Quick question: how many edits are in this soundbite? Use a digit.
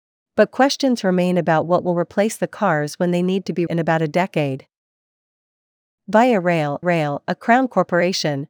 2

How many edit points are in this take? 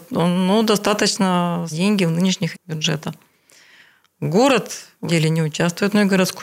3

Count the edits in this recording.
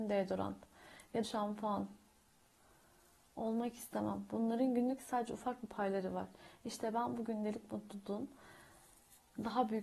2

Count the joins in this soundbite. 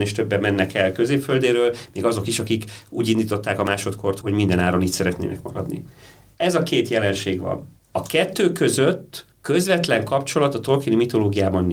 2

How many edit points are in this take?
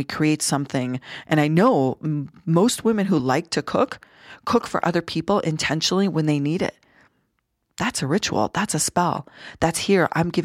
0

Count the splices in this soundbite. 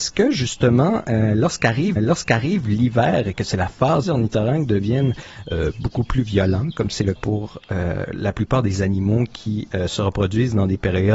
3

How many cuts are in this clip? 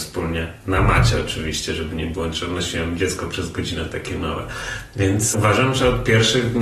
1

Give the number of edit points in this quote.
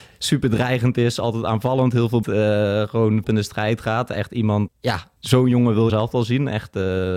5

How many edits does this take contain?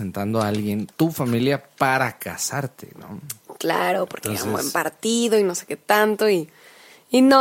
1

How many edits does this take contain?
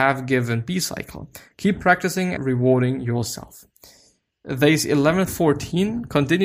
2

